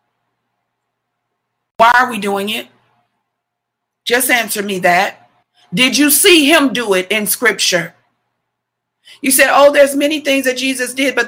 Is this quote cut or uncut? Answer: cut